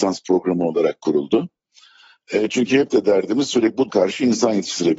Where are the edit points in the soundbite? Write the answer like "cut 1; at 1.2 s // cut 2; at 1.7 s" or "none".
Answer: cut 1; at 3.9 s